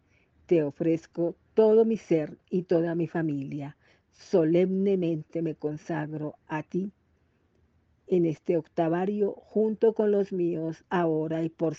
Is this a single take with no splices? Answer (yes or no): yes